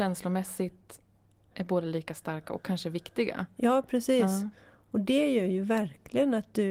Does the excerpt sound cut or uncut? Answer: uncut